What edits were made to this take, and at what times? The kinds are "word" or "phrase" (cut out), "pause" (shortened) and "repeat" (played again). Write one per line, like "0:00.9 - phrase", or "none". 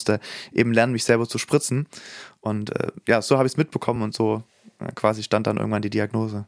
none